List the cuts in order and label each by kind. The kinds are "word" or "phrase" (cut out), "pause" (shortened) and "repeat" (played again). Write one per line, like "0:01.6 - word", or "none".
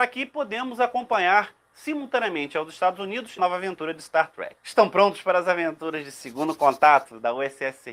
0:03.4 - word
0:04.6 - pause